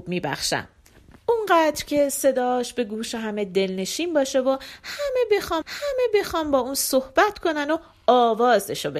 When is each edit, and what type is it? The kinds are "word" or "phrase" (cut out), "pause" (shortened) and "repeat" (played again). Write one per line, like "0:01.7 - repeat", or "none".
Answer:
0:05.6 - repeat